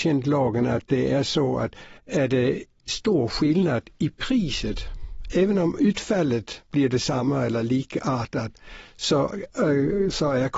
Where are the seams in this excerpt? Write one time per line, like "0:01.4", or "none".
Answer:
0:02.0